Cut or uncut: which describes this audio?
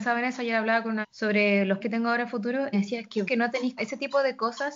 cut